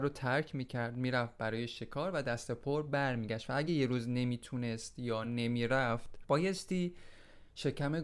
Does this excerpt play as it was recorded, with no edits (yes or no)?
yes